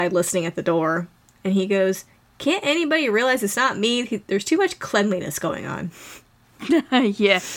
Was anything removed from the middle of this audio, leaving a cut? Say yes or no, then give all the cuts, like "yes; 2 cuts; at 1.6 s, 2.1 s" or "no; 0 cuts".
no; 0 cuts